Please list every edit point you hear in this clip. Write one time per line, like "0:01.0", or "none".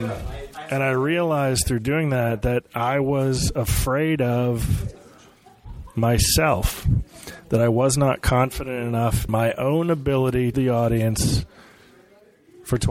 0:09.3
0:10.5